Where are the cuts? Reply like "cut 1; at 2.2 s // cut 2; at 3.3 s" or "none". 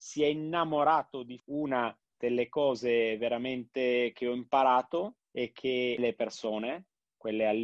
cut 1; at 1.4 s // cut 2; at 2.0 s // cut 3; at 5.2 s // cut 4; at 6.0 s